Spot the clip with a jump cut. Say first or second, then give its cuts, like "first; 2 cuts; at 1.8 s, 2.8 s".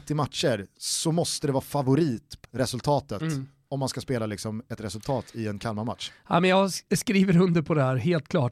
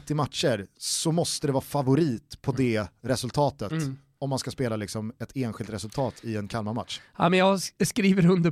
first; 2 cuts; at 2.4 s, 4.8 s